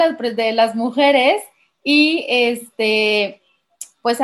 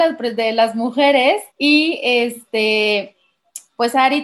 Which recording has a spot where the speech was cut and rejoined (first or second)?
second